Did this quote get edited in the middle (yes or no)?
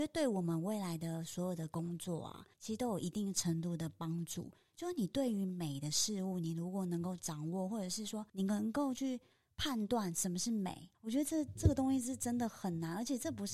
yes